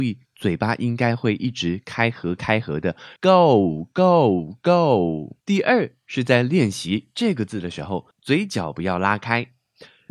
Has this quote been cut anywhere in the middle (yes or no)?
yes